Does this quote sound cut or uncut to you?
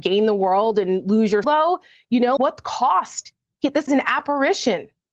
cut